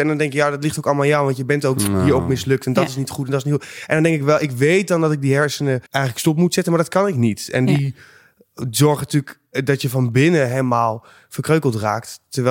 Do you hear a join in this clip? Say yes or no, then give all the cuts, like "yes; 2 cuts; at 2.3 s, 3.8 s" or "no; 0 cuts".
yes; 1 cut; at 5.9 s